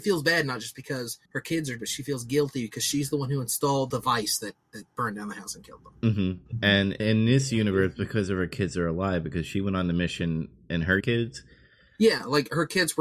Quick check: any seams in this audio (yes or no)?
yes